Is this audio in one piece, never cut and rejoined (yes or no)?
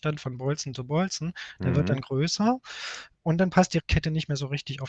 yes